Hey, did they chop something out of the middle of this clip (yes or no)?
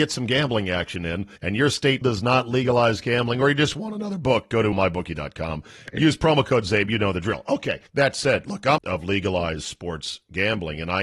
yes